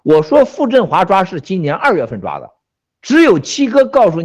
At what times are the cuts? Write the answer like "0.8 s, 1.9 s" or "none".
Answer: none

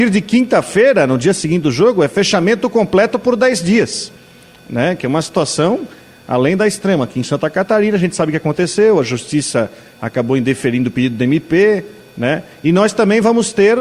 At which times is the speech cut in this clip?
none

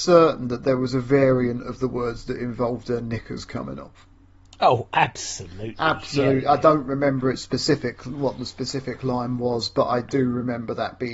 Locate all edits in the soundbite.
none

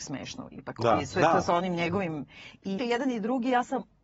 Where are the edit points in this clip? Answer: 2.8 s

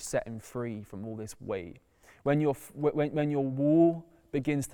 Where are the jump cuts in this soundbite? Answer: none

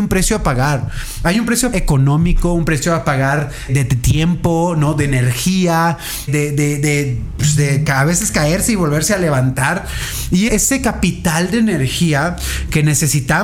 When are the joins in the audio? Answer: 1.7 s, 3.7 s, 6.3 s, 10.5 s

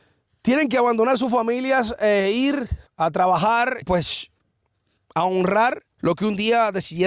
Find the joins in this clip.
2.9 s, 3.8 s, 5.9 s

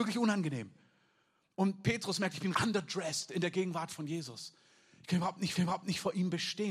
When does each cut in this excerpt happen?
2.5 s, 5.6 s

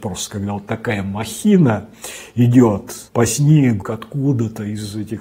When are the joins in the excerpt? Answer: 3.1 s, 3.8 s

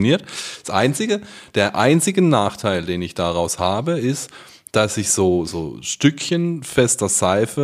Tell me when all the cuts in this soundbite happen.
none

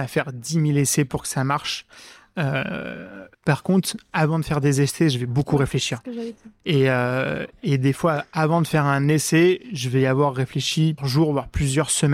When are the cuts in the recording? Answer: 3.3 s, 11.0 s

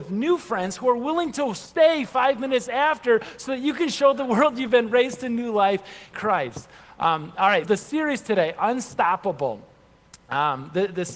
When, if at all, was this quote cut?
6.1 s, 7.6 s

